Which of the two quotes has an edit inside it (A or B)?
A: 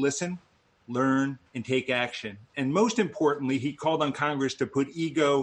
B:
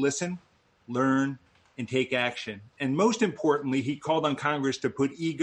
A